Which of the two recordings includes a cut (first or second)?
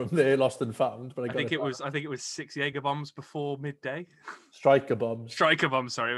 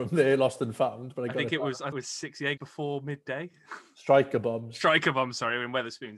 second